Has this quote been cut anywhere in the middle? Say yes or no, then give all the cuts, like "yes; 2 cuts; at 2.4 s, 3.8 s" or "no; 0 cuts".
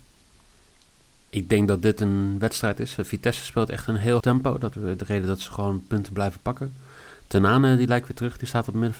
yes; 2 cuts; at 4.2 s, 4.7 s